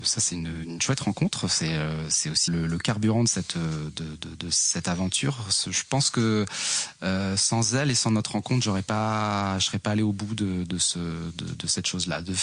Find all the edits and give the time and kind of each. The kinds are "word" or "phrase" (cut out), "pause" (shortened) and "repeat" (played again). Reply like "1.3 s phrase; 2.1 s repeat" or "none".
2.5 s word

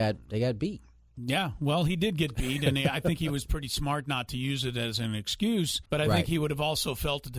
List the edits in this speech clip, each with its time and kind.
5.9 s pause

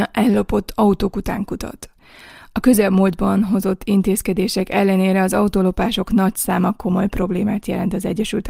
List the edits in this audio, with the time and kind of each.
none

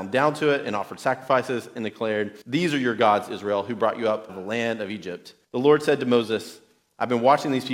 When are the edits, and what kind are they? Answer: 2.4 s pause; 4.3 s word; 5.4 s pause

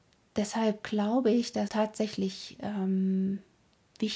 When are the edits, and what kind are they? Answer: 1.7 s word

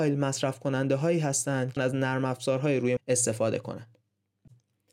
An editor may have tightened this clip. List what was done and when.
1.8 s word; 3.0 s word

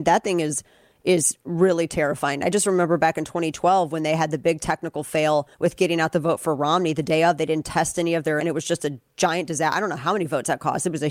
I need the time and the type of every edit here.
5.5 s pause; 8.4 s phrase

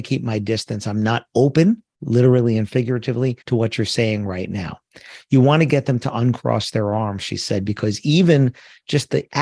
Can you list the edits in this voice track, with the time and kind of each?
3.4 s pause

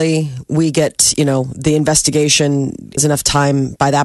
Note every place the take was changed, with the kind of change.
3.0 s word

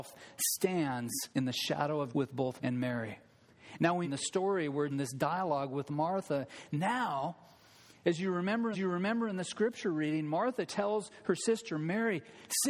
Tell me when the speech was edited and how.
1.3 s pause; 2.1 s word; 2.6 s word; 4.0 s phrase; 4.9 s phrase; 8.7 s repeat

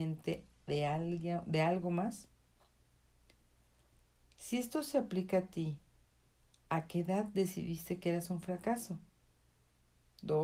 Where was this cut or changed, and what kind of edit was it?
none

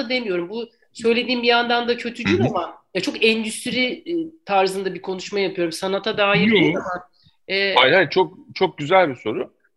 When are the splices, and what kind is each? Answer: none

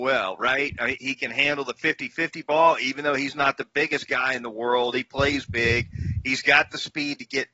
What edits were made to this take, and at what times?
1.0 s word

